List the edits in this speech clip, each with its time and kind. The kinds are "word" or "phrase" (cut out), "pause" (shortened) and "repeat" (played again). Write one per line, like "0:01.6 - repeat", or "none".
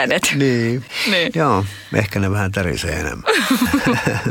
none

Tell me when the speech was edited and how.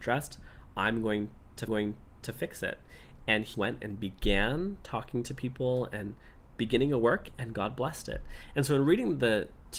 0:01.7 - repeat
0:03.5 - word

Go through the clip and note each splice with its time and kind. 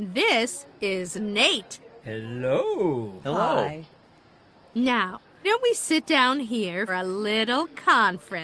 0:05.4 - word
0:06.9 - word

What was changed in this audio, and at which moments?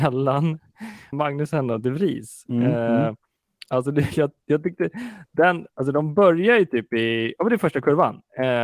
0:01.1 - word

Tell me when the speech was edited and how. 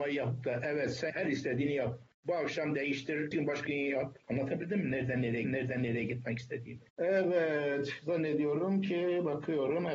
0:01.1 - word
0:02.1 - pause
0:03.3 - word
0:03.7 - phrase
0:04.2 - pause
0:05.4 - repeat
0:06.9 - pause

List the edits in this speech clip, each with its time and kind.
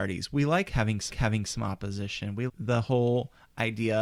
0:01.1 - repeat
0:02.5 - word

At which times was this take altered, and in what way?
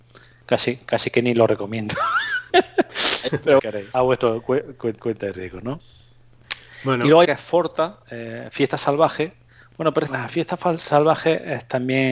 0:02.5 - pause
0:03.6 - phrase
0:03.9 - word
0:05.0 - repeat
0:07.2 - phrase
0:08.0 - pause
0:09.5 - pause
0:10.1 - word

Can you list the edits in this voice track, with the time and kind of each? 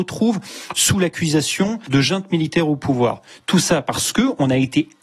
none

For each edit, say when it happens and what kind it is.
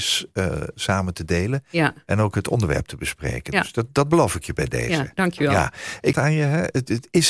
0:06.1 - phrase

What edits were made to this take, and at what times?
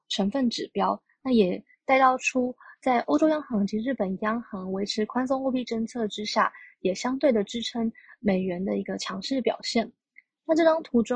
none

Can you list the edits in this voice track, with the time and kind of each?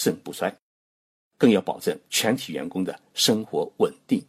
0:02.0 - pause

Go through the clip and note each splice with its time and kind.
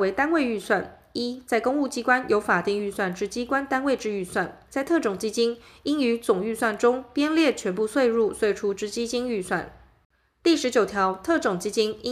0:04.7 - word

